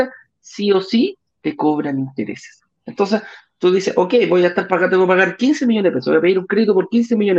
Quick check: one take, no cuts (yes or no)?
yes